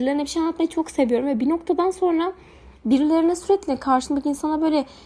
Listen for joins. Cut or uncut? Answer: uncut